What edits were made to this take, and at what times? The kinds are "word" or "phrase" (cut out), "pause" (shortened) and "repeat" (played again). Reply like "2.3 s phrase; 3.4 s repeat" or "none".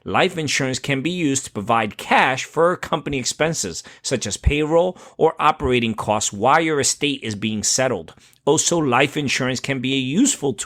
none

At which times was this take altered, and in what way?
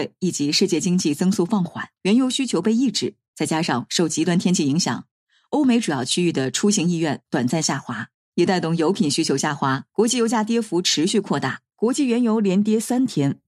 2.0 s pause; 9.9 s pause; 11.7 s pause

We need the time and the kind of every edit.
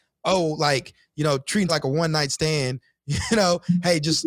1.7 s word

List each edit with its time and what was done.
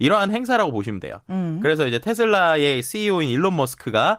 none

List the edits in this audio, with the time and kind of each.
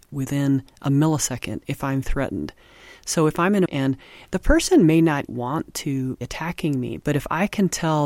2.0 s word; 3.7 s word; 5.3 s word; 6.2 s word

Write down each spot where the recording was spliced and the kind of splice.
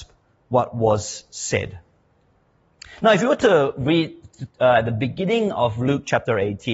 none

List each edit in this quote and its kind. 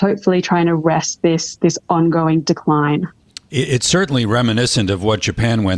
none

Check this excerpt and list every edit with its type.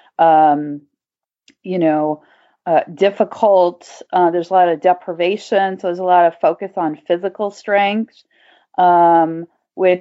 none

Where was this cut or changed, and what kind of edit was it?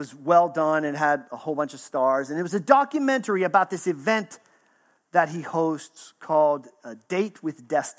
none

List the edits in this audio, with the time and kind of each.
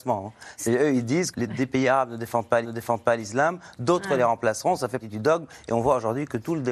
1.3 s phrase; 2.6 s repeat; 5.0 s word

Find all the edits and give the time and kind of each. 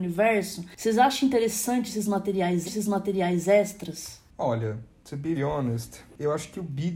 2.6 s repeat; 5.3 s word

